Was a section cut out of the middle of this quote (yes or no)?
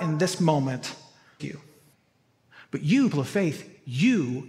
yes